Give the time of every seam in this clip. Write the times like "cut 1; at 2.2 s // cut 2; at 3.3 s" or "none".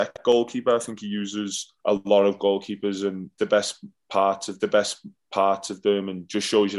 cut 1; at 1.8 s // cut 2; at 3.4 s // cut 3; at 4.6 s